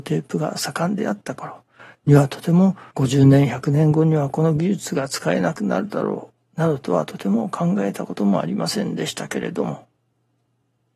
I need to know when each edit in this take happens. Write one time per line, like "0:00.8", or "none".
0:02.9